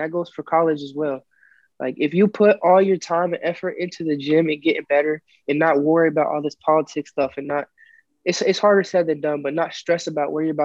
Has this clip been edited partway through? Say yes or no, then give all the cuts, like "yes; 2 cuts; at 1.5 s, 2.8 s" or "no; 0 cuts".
no; 0 cuts